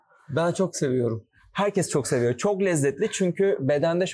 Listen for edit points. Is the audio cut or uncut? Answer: uncut